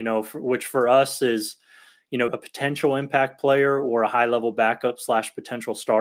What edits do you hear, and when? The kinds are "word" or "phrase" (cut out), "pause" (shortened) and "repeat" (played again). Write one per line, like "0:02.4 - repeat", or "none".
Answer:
0:02.3 - word